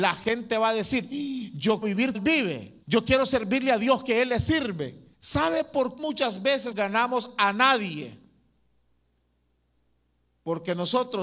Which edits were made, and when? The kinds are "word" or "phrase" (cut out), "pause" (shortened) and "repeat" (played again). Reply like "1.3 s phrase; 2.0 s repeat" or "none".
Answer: 1.8 s word; 2.1 s word; 2.8 s pause; 5.1 s pause; 6.0 s word; 6.7 s phrase